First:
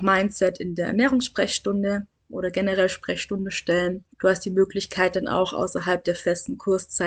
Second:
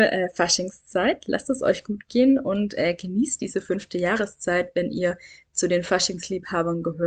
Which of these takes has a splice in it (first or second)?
first